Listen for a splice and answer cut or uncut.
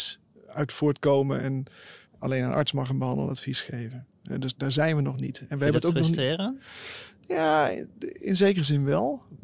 cut